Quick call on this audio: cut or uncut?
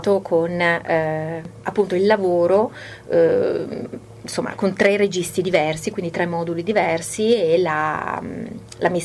uncut